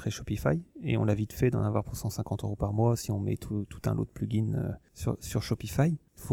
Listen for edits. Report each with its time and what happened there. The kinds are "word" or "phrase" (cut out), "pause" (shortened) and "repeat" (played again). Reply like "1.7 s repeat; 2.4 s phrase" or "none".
none